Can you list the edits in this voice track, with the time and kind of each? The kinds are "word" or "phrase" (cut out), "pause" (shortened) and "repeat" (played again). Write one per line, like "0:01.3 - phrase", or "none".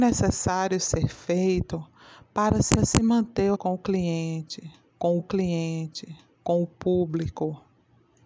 0:02.8 - repeat
0:03.5 - word
0:05.2 - repeat